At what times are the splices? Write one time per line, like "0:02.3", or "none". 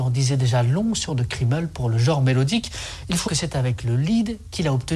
0:01.1
0:03.3